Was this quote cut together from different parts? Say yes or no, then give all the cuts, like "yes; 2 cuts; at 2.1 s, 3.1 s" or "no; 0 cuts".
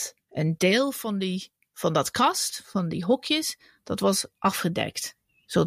no; 0 cuts